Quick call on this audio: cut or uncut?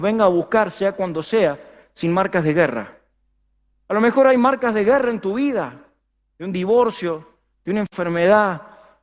uncut